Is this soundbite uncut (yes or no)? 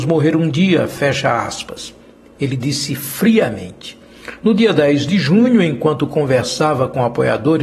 yes